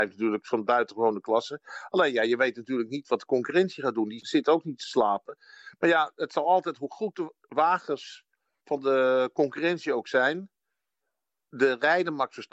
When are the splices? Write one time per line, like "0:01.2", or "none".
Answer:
none